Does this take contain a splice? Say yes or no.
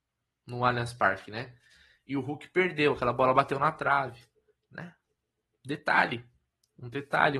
no